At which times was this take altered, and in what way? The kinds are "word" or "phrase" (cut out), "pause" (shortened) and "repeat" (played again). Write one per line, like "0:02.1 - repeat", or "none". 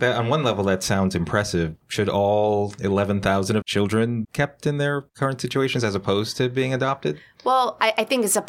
0:01.8 - word
0:03.6 - word
0:04.2 - word